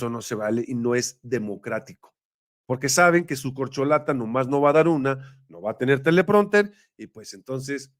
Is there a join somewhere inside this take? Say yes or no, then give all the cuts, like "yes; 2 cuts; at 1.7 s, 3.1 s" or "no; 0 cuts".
no; 0 cuts